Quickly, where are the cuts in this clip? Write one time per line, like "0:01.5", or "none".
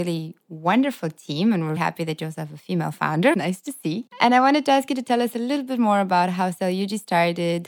0:01.8
0:03.3